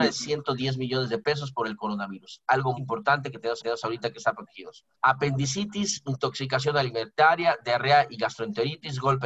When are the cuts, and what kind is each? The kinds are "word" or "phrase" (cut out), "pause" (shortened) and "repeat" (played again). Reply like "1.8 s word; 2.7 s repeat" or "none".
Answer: 2.8 s word; 3.6 s repeat; 4.9 s pause